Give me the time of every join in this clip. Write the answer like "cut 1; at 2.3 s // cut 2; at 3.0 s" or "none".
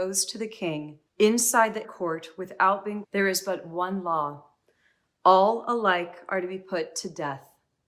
cut 1; at 1.1 s // cut 2; at 1.8 s // cut 3; at 3.0 s

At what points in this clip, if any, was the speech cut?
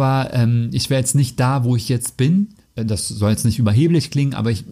cut 1; at 2.6 s

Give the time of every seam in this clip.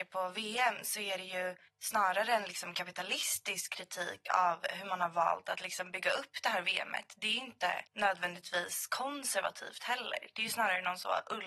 cut 1; at 1.7 s // cut 2; at 7.9 s

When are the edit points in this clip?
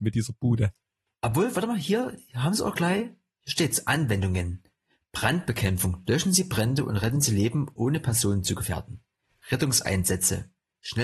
none

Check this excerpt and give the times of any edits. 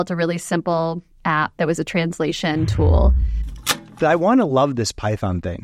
none

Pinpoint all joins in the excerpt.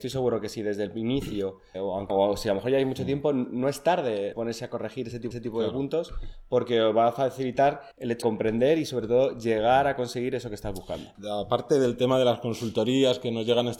cut 1; at 1.7 s // cut 2; at 2.1 s // cut 3; at 4.3 s // cut 4; at 5.3 s // cut 5; at 7.9 s // cut 6; at 8.2 s

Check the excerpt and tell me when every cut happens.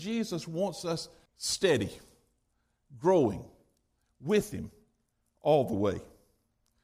cut 1; at 1.3 s

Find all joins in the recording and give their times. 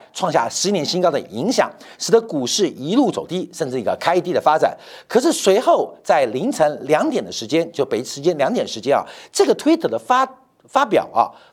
none

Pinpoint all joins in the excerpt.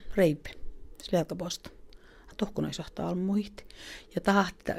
none

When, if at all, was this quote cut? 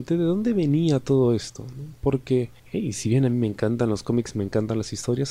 cut 1; at 2.6 s

